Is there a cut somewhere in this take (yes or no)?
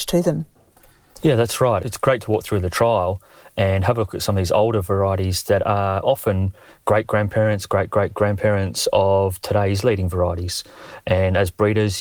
no